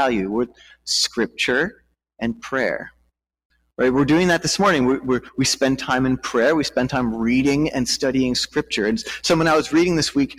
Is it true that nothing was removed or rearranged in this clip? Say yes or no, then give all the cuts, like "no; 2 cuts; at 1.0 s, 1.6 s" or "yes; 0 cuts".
yes; 0 cuts